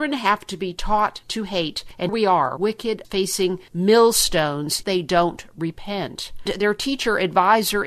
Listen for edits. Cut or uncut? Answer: cut